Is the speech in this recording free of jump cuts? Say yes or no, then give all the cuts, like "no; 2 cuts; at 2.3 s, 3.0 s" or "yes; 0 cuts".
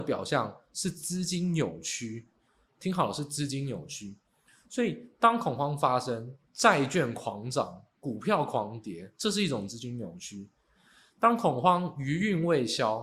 yes; 0 cuts